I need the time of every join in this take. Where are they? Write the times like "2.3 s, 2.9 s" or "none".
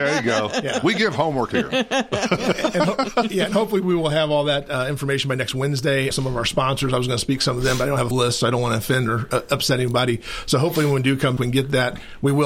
1.5 s, 6.1 s, 8.1 s, 11.4 s